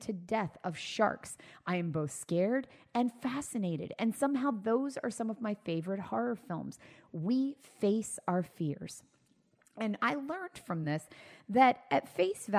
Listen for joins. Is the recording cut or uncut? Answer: uncut